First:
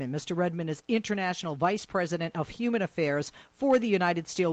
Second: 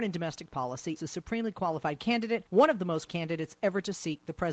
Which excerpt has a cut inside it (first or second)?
second